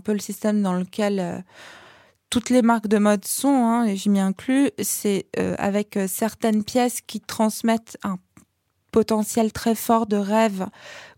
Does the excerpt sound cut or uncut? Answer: uncut